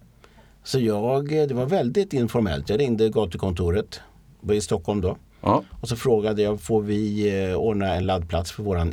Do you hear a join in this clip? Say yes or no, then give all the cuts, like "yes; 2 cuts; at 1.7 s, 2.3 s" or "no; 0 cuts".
no; 0 cuts